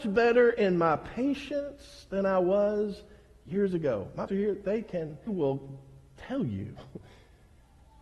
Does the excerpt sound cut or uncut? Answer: cut